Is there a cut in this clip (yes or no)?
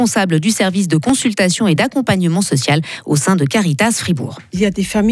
no